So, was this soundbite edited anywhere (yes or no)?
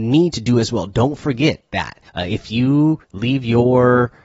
yes